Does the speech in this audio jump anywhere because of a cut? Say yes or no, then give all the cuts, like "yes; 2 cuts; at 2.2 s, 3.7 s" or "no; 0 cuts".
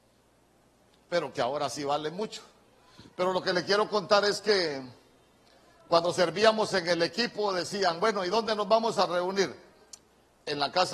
no; 0 cuts